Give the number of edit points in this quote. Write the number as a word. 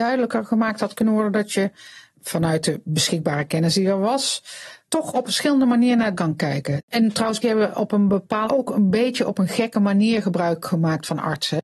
six